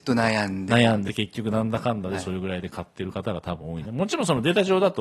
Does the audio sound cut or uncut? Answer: cut